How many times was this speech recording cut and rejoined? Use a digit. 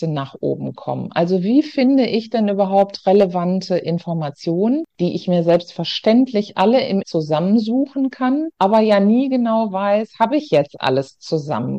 2